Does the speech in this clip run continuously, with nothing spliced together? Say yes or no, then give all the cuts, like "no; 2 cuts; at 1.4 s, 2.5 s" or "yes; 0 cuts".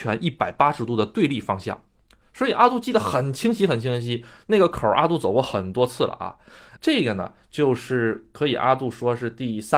no; 1 cut; at 6.8 s